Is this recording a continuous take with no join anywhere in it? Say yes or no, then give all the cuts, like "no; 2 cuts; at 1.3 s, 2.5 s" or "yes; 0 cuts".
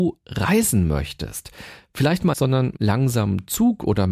no; 2 cuts; at 2.3 s, 2.8 s